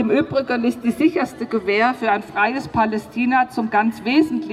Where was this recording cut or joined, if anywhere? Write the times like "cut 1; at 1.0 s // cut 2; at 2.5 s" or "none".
none